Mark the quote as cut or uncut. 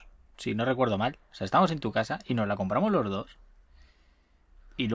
uncut